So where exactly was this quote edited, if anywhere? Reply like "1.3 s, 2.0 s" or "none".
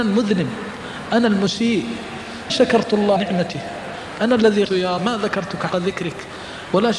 2.5 s, 3.2 s, 4.6 s, 5.0 s, 5.7 s